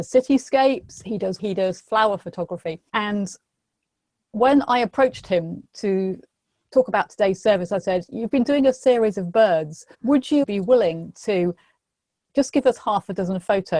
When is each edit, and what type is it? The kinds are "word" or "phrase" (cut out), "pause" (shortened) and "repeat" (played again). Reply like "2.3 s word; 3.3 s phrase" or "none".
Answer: 1.4 s phrase; 2.9 s pause; 9.9 s pause; 10.4 s word